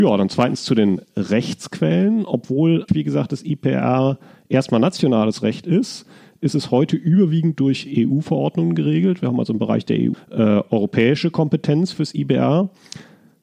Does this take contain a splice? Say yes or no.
yes